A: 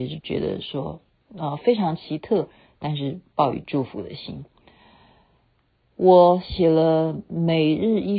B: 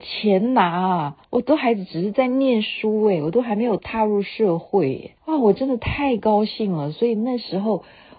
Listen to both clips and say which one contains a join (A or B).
B